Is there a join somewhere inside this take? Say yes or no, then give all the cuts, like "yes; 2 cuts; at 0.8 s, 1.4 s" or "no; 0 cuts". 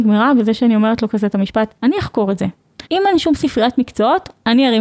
yes; 2 cuts; at 1.8 s, 2.9 s